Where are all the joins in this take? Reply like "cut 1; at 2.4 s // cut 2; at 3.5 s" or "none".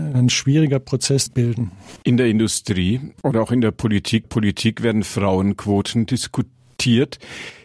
cut 1; at 1.3 s // cut 2; at 3.2 s // cut 3; at 4.2 s